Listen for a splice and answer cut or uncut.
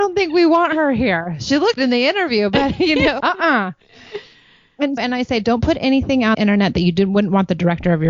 cut